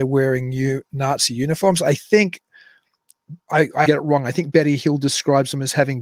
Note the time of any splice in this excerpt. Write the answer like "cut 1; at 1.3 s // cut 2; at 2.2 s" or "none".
cut 1; at 3.4 s // cut 2; at 3.9 s